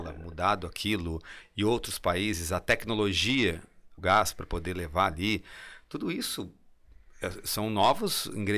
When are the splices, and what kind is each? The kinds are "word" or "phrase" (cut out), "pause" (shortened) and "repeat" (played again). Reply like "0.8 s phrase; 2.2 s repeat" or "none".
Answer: 4.0 s phrase